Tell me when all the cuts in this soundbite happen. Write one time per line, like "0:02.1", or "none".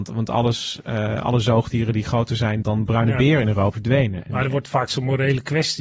0:02.6
0:03.7